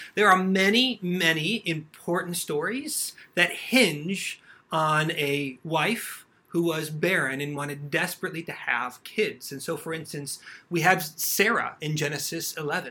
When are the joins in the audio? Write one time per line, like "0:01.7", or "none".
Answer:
none